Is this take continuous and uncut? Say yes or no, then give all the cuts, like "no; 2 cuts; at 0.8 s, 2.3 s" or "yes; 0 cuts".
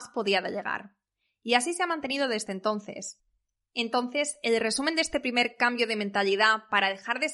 yes; 0 cuts